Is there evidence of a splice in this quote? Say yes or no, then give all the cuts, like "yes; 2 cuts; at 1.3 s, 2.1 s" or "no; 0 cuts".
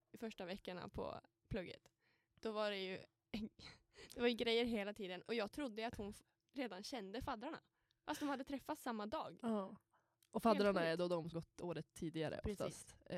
yes; 1 cut; at 11.3 s